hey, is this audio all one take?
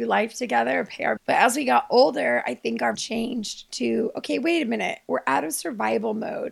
no; 2 cuts; at 1.2 s, 2.9 s

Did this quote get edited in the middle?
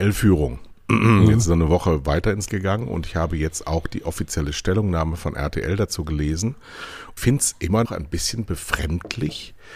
yes; 3 cuts; at 2.5 s, 7.2 s, 7.8 s

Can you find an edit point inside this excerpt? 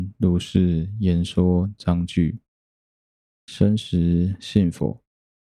no; 0 cuts

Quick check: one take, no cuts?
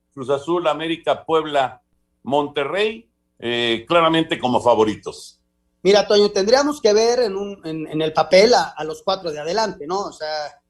yes; 0 cuts

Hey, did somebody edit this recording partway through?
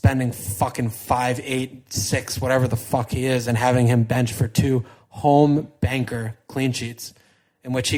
no; 0 cuts

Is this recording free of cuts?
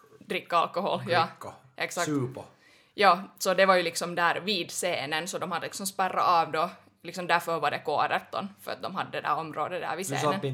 yes; 0 cuts

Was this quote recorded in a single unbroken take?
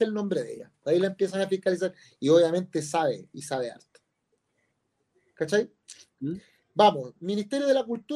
yes; 0 cuts

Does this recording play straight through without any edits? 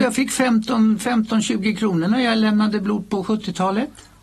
yes; 0 cuts

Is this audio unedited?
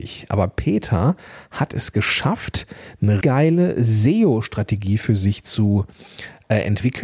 no; 1 cut; at 3.2 s

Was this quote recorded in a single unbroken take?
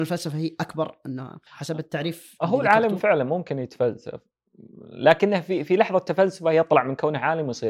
no; 1 cut; at 1.5 s

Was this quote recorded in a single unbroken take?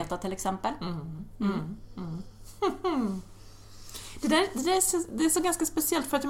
yes; 0 cuts

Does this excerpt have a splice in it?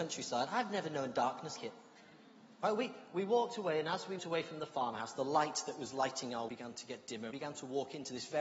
yes; 4 cuts; at 1.6 s, 4.2 s, 6.5 s, 7.3 s

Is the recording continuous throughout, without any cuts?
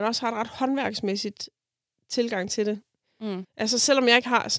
yes; 0 cuts

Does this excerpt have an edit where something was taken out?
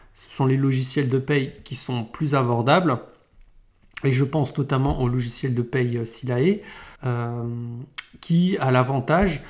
yes; 1 cut; at 7.0 s

